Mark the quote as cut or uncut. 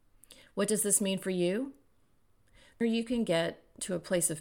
cut